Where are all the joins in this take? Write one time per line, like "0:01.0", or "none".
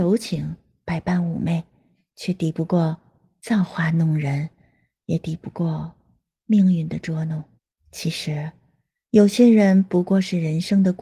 0:07.6

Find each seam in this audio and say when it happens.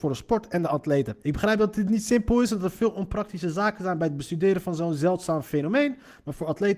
0:01.2

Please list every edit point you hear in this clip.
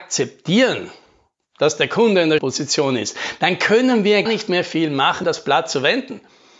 0:02.4
0:04.3
0:05.2

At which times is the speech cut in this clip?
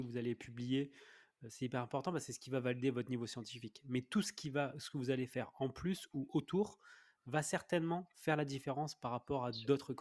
none

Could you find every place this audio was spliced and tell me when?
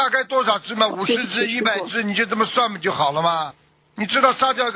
none

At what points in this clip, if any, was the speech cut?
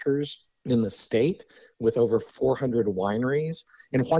none

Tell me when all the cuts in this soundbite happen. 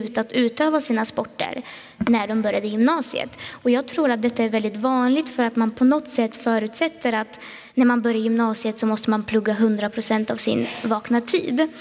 0:07.7

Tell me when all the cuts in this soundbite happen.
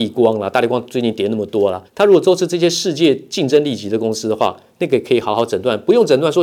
0:01.9

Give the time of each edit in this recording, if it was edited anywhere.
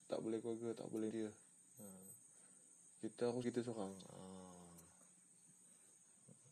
0:01.1
0:03.4

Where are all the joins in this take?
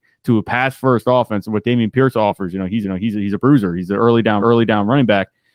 0:02.8
0:04.4

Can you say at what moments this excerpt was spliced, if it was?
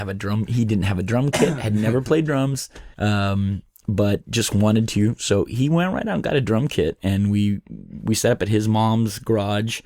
0:02.9
0:08.0

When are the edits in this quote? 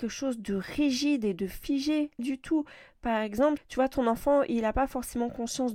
0:02.2
0:03.6

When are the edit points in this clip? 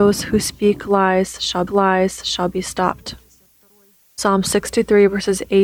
0:01.7

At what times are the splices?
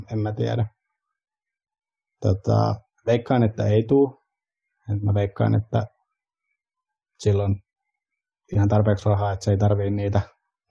0:02.9

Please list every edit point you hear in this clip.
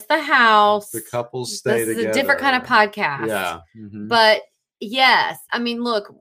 none

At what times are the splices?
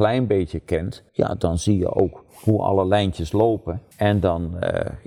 0:01.1
0:03.9

